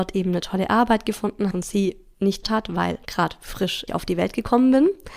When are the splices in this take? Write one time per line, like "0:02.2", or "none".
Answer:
0:01.5
0:02.4
0:03.0
0:03.9